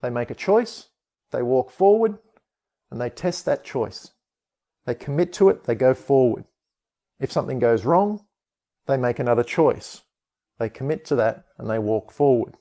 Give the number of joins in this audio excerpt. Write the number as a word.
zero